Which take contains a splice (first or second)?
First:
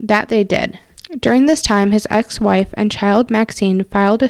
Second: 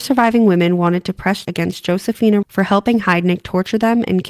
second